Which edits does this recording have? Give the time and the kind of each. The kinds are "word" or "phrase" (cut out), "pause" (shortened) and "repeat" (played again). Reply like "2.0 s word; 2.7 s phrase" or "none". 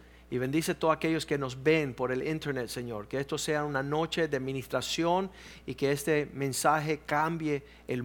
none